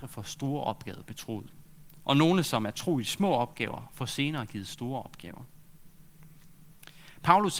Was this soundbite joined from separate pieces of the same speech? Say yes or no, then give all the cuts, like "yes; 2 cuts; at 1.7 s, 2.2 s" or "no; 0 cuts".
no; 0 cuts